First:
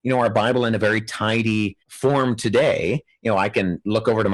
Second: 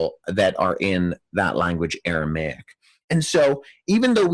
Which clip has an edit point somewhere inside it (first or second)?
first